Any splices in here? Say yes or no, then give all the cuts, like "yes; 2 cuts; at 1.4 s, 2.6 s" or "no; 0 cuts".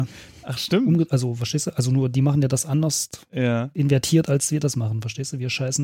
no; 0 cuts